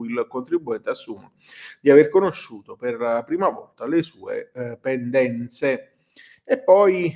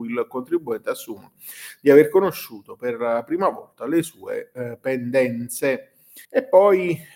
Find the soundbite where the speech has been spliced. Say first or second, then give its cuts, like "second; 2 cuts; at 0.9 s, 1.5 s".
second; 1 cut; at 6.2 s